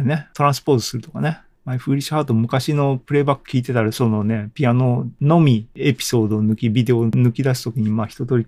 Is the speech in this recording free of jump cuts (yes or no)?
yes